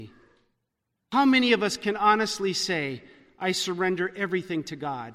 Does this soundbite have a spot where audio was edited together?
no; 0 cuts

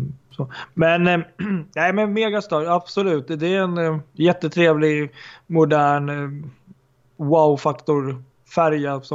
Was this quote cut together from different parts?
no; 0 cuts

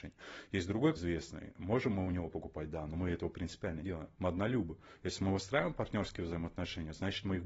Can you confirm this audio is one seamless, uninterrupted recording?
no; 3 cuts; at 1.0 s, 3.8 s, 4.1 s

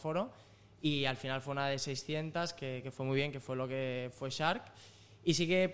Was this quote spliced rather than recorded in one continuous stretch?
no; 0 cuts

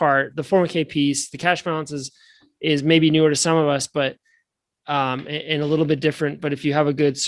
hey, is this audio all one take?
yes; 0 cuts

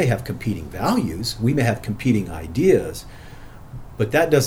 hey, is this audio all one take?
yes; 0 cuts

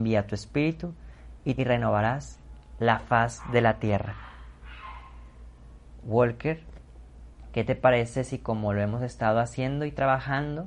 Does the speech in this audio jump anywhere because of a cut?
yes; 1 cut; at 1.6 s

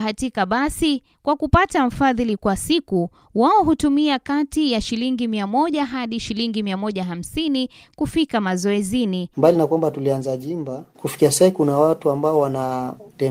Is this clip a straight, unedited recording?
yes; 0 cuts

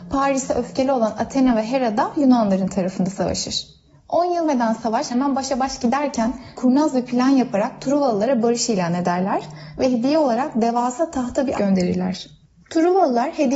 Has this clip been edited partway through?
yes; 4 cuts; at 4.4 s, 5.1 s, 6.6 s, 11.6 s

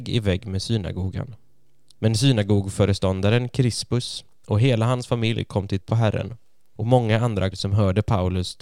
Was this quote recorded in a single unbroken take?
no; 2 cuts; at 5.8 s, 7.5 s

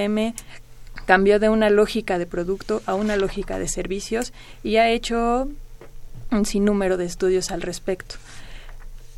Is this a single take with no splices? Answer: yes; 0 cuts

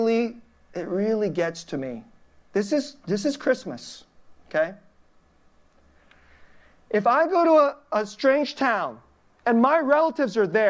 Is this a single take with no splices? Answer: yes; 0 cuts

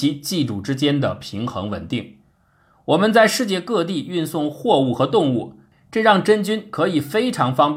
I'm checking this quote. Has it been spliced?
no; 0 cuts

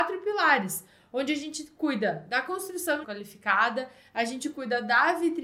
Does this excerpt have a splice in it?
yes; 1 cut; at 3.0 s

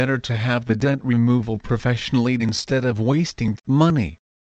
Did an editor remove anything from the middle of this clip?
yes; 2 cuts; at 2.4 s, 3.6 s

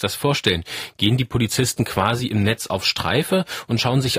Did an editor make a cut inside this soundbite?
no; 0 cuts

